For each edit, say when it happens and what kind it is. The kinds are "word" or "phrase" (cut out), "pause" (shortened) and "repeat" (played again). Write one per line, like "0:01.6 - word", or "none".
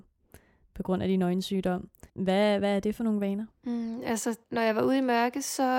0:02.1 - pause
0:03.5 - pause
0:04.4 - pause